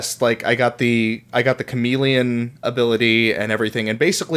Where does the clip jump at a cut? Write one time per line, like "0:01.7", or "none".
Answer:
0:02.6